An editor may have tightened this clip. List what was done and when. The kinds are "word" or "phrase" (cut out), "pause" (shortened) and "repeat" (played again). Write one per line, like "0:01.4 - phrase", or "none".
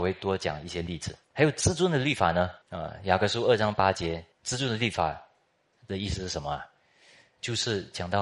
0:01.2 - pause
0:02.6 - pause
0:04.3 - pause